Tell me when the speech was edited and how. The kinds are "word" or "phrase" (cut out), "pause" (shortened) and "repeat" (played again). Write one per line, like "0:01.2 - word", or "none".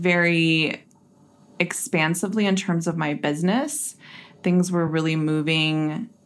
none